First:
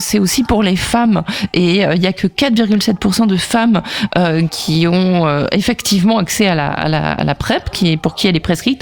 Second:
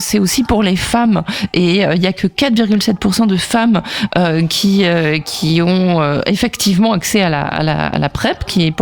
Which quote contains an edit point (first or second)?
first